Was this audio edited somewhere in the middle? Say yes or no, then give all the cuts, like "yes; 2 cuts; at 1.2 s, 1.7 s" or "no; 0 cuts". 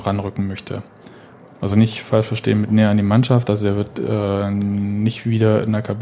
no; 0 cuts